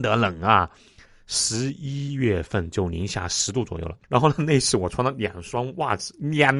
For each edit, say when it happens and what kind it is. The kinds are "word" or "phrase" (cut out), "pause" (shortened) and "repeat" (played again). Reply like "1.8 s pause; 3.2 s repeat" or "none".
4.0 s pause